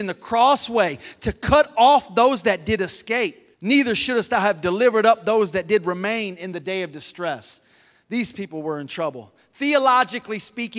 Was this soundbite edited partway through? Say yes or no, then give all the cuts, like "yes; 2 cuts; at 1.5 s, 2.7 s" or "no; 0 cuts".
yes; 1 cut; at 3.5 s